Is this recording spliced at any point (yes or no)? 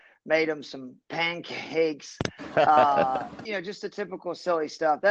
yes